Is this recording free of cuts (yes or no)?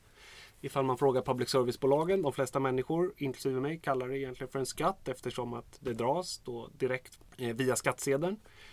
yes